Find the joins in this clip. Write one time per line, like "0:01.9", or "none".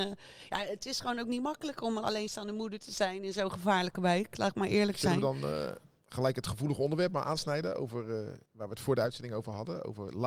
0:08.5